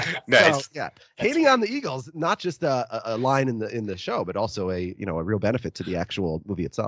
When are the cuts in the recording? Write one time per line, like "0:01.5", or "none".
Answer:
none